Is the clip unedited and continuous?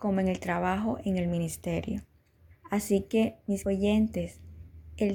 no; 2 cuts; at 2.5 s, 3.6 s

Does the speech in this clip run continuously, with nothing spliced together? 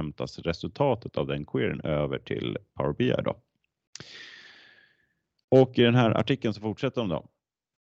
yes; 0 cuts

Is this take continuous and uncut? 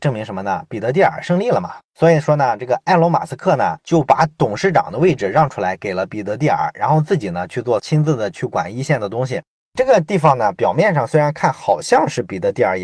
no; 2 cuts; at 1.8 s, 7.8 s

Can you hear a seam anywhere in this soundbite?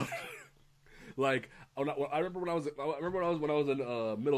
no; 0 cuts

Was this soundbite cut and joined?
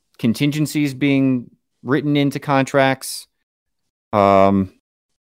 no; 0 cuts

